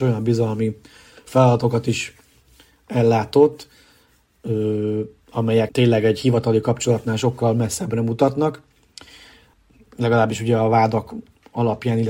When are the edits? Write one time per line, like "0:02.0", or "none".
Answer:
0:05.7